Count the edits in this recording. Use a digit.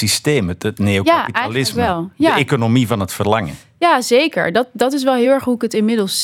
0